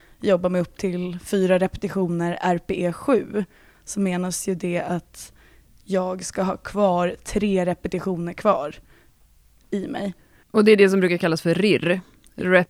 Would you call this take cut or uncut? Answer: uncut